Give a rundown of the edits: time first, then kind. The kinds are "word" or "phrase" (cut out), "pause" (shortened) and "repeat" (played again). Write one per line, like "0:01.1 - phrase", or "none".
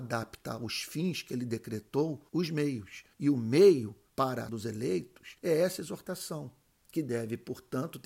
0:02.3 - pause
0:03.1 - pause
0:04.1 - pause
0:04.5 - word
0:05.4 - pause
0:06.7 - pause